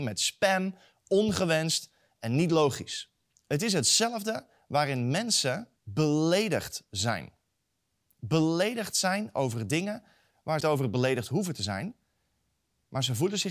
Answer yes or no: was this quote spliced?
yes